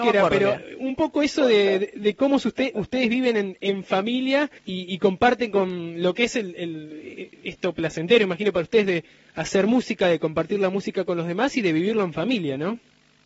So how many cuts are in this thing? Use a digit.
1